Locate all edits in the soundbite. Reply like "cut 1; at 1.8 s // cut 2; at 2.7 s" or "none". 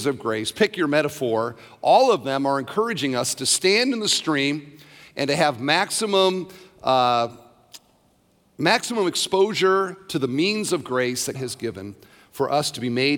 cut 1; at 11.3 s